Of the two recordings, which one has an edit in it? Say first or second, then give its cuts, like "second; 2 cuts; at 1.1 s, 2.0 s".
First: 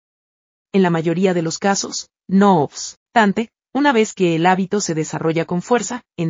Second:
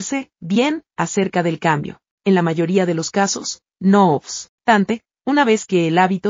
second; 1 cut; at 2.1 s